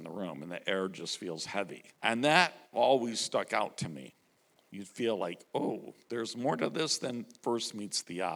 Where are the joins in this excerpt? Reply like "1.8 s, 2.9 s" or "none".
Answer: 1.9 s